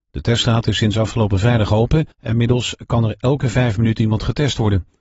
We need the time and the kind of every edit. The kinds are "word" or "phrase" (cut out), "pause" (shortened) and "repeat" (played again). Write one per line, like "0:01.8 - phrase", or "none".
0:02.1 - pause